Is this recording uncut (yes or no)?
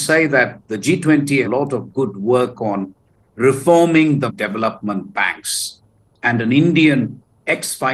no